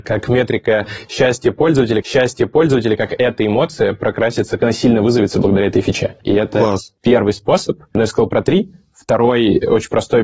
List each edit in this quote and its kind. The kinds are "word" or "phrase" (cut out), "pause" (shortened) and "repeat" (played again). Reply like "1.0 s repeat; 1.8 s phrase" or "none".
2.0 s repeat; 4.6 s word